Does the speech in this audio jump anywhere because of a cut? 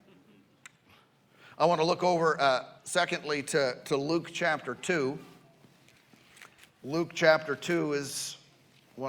yes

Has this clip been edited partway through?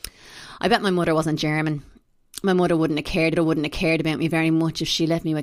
yes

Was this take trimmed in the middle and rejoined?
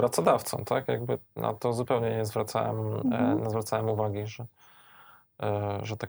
yes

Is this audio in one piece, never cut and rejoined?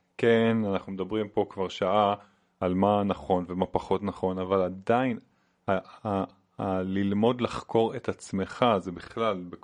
yes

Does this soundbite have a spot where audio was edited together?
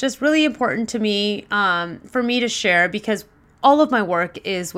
no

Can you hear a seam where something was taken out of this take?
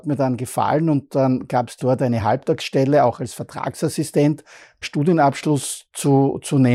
yes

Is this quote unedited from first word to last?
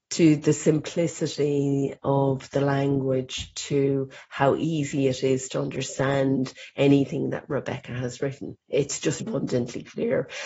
no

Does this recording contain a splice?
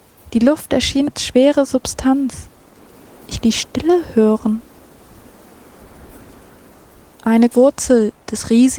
yes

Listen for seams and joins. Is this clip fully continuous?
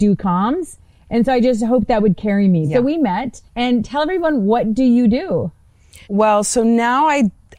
no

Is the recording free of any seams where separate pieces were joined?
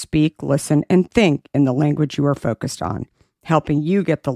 yes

